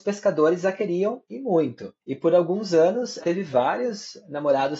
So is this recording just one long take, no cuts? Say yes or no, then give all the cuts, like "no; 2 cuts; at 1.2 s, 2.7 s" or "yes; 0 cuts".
no; 2 cuts; at 2.0 s, 3.2 s